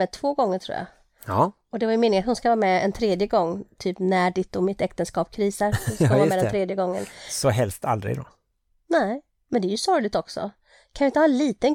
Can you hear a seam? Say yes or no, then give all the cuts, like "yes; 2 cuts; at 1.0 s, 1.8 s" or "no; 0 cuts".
no; 0 cuts